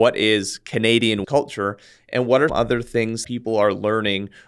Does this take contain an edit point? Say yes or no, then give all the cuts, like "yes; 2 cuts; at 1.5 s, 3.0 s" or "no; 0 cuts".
yes; 3 cuts; at 1.2 s, 2.5 s, 3.2 s